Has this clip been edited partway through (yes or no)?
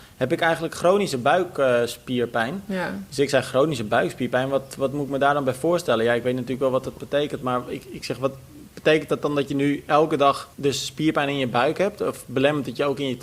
yes